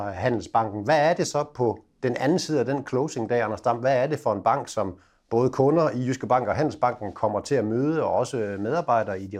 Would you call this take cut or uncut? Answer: uncut